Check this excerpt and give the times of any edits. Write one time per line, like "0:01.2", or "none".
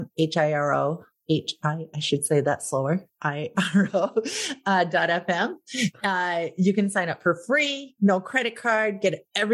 none

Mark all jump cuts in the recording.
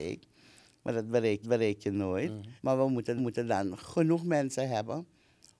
0:01.4
0:02.6
0:03.2

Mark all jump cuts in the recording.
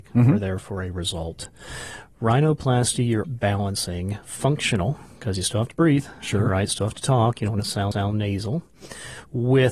0:03.2
0:07.9

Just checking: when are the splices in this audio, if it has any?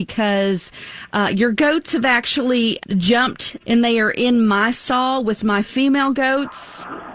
0:02.8
0:03.6

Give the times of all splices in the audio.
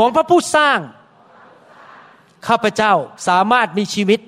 0:03.2

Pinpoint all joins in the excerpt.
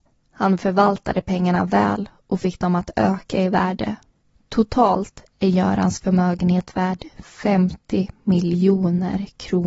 none

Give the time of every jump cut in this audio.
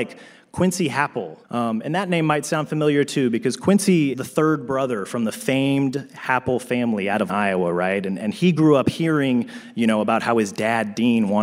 0:01.4
0:04.1
0:07.3

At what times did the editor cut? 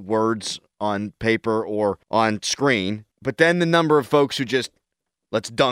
0:02.0
0:03.1

